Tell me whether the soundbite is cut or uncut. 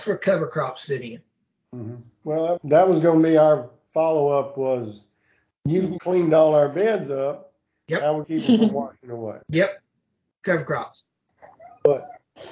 cut